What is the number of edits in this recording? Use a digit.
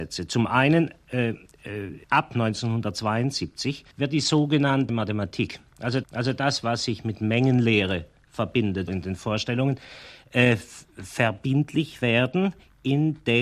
5